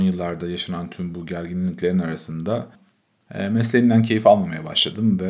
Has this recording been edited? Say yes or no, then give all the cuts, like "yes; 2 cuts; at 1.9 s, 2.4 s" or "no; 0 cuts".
no; 0 cuts